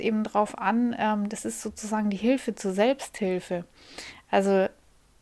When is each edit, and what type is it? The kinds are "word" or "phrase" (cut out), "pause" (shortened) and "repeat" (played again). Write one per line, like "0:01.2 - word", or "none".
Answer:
none